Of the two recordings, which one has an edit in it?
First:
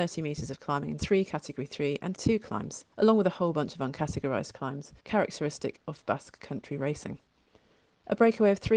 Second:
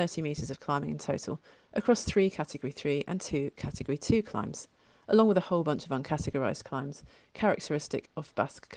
first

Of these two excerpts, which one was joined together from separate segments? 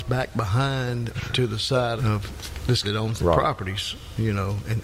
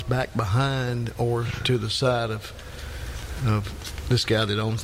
first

